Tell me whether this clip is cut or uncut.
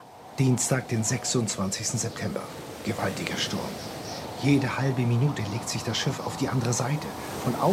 uncut